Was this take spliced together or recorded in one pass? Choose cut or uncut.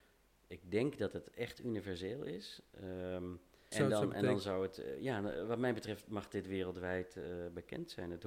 cut